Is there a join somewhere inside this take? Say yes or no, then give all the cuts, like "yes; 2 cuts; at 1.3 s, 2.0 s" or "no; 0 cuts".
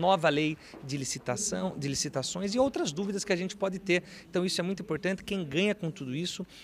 no; 0 cuts